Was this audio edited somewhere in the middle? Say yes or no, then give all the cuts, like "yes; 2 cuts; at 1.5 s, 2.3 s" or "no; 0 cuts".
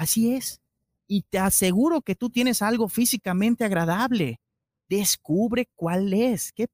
no; 0 cuts